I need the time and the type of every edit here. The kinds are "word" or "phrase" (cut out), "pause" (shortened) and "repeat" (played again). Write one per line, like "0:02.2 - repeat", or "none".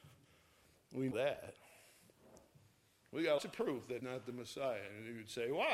0:01.1 - word
0:03.4 - word
0:04.0 - word

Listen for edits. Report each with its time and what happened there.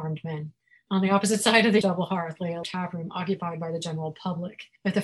0:01.8 - word
0:02.6 - word

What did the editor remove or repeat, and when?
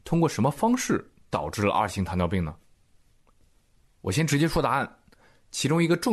none

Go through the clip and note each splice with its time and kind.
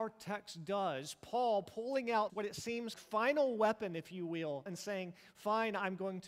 0:02.3 - word
0:02.9 - word
0:04.7 - word

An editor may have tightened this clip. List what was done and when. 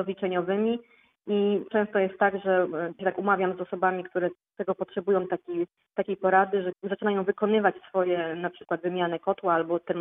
0:01.7 - word
0:03.0 - word
0:06.7 - word

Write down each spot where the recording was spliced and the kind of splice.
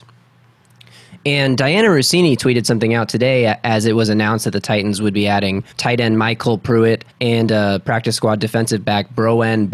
0:05.7 - pause
0:07.1 - pause

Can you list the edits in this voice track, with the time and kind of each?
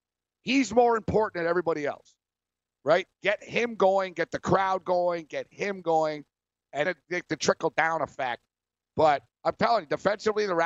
0:06.9 - word

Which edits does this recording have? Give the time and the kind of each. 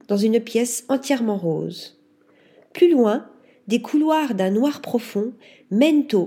none

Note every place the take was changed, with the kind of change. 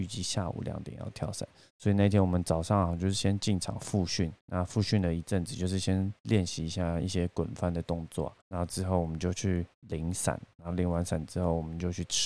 0:01.7 - pause
0:04.4 - pause
0:08.4 - pause
0:09.7 - pause

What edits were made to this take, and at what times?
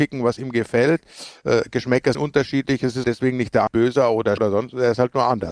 0:02.1 - word
0:03.0 - word
0:03.7 - word
0:04.4 - word

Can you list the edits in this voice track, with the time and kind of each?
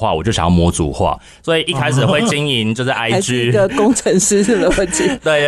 none

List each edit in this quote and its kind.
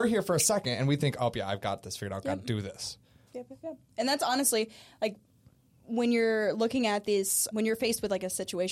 0:07.5 - word

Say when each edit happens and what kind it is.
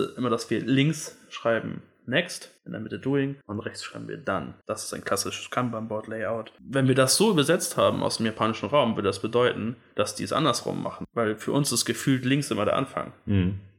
0:02.6 - pause
0:03.4 - pause
0:04.6 - pause

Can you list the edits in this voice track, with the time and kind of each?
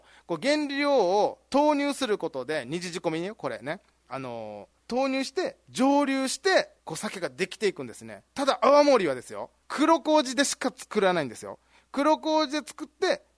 0:04.8 - pause
0:06.8 - pause
0:09.6 - pause

